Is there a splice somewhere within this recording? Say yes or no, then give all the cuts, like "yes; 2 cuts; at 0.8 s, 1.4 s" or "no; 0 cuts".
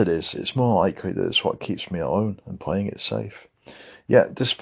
no; 0 cuts